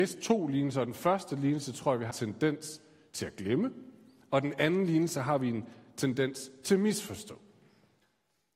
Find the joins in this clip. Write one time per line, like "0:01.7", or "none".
0:02.1